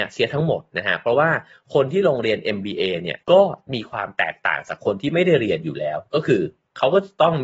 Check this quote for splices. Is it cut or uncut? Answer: cut